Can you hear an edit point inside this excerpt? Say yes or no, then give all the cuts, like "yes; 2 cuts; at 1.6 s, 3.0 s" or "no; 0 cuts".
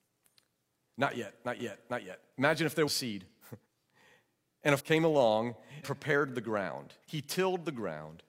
yes; 6 cuts; at 1.6 s, 2.9 s, 3.6 s, 4.8 s, 5.8 s, 7.0 s